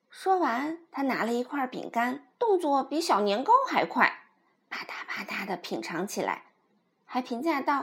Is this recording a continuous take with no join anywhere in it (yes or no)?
no